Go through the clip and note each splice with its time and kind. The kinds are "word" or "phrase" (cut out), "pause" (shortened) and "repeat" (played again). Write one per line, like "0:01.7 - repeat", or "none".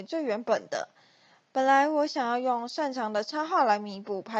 none